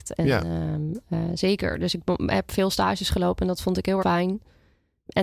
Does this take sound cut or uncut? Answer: cut